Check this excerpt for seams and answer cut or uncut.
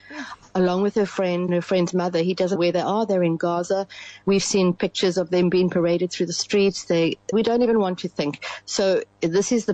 cut